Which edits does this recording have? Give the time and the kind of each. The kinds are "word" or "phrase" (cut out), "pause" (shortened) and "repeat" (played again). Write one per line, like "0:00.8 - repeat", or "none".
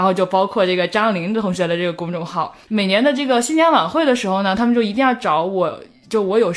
0:02.6 - pause